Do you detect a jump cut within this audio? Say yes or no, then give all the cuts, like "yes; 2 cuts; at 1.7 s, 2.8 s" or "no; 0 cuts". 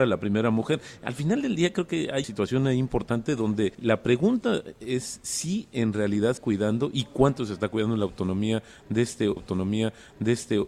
yes; 4 cuts; at 2.2 s, 3.7 s, 6.4 s, 9.4 s